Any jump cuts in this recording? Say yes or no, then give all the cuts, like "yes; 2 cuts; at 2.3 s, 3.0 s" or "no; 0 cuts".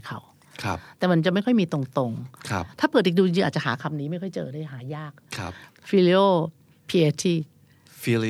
no; 0 cuts